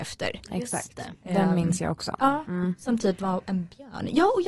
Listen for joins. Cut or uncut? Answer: uncut